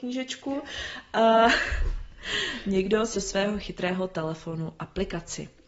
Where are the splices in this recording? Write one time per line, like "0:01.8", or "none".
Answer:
0:03.1